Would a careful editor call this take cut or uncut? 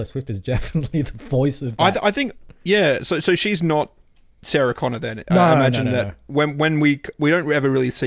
uncut